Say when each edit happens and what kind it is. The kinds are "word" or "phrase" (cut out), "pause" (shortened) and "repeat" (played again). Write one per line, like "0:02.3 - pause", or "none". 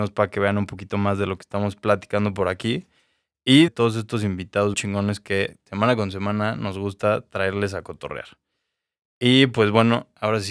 0:03.7 - phrase
0:04.7 - word

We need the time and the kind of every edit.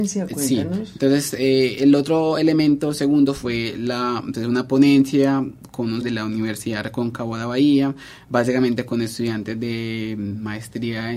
0:06.0 - word

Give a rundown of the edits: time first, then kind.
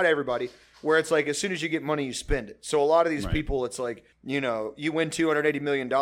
0:04.1 - pause

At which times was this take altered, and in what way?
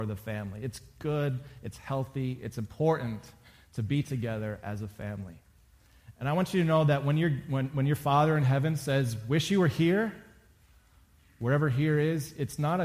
none

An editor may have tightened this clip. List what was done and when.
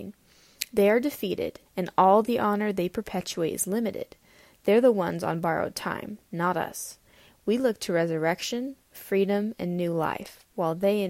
0:01.7 - pause

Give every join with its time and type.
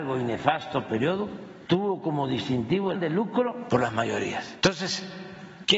0:02.9 - word
0:03.7 - phrase

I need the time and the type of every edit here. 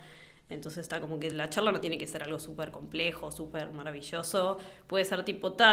none

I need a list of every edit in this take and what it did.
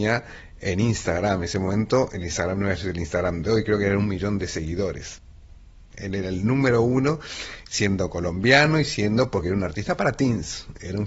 none

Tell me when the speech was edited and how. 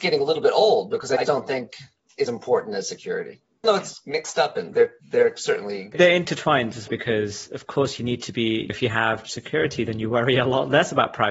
0:01.2 - word
0:02.3 - word
0:03.6 - word
0:04.7 - word
0:06.9 - word
0:09.2 - word

